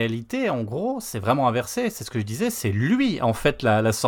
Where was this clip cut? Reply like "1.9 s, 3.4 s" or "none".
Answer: none